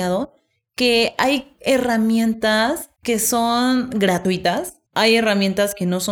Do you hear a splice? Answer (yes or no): yes